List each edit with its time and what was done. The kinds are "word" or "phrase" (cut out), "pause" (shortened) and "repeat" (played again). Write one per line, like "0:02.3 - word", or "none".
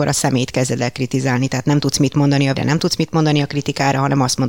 0:02.6 - word